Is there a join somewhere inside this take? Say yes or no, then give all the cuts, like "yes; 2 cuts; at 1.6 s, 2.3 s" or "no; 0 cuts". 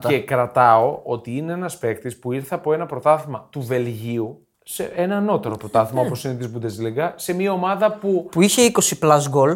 yes; 1 cut; at 4.5 s